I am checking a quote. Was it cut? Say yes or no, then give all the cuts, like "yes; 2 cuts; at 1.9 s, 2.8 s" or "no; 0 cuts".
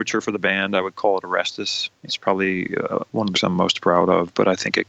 yes; 2 cuts; at 2.1 s, 3.3 s